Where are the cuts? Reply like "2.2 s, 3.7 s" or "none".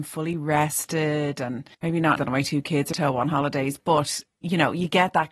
1.7 s, 2.2 s, 2.9 s